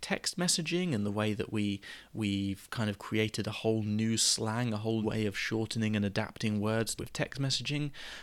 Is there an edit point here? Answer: yes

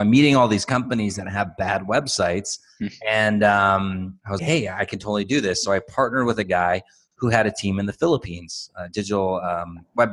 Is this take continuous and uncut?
no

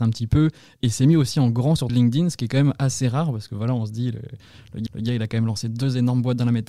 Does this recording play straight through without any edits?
no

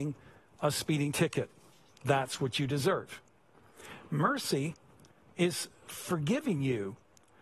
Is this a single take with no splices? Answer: yes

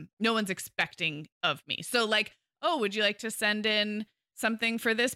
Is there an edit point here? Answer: no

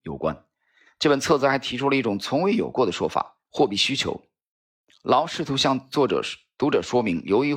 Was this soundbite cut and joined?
yes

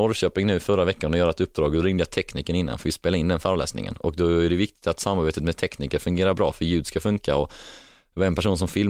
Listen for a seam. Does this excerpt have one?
no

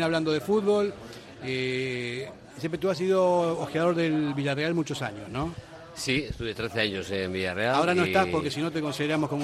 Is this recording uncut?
yes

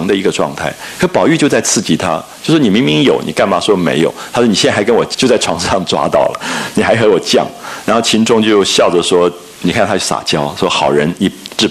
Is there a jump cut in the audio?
yes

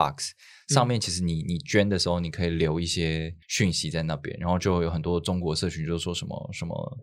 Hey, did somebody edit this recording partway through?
yes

